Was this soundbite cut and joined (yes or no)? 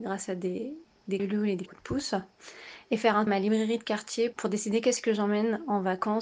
yes